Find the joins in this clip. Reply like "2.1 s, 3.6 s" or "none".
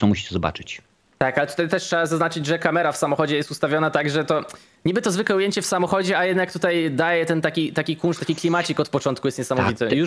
none